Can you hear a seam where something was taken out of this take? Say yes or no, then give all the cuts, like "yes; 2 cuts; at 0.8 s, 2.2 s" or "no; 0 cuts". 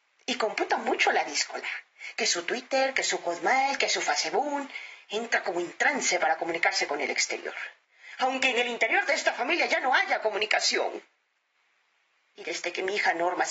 no; 0 cuts